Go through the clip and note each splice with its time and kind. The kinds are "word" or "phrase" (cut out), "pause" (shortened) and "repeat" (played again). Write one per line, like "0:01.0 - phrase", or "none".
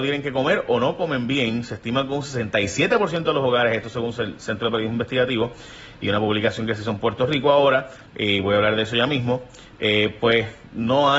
0:08.1 - pause